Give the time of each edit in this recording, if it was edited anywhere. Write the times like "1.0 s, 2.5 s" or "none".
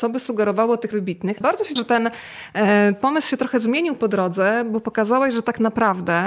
0.9 s, 1.4 s, 1.8 s